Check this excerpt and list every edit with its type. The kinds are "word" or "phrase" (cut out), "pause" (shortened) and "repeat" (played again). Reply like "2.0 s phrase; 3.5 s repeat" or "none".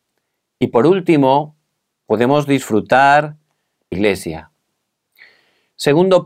3.9 s phrase